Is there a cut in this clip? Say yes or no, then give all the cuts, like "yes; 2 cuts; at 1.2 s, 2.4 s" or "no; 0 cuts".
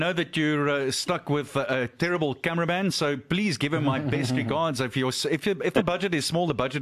no; 0 cuts